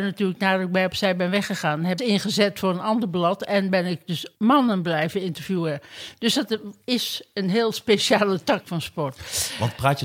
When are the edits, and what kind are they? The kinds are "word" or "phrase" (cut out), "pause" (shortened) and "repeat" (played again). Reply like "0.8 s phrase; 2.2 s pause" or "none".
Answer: 2.0 s phrase; 4.4 s pause; 6.8 s pause